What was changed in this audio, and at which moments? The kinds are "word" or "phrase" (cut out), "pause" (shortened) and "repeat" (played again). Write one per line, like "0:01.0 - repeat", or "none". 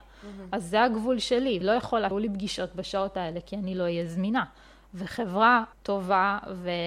0:01.6 - word
0:02.1 - word
0:05.7 - pause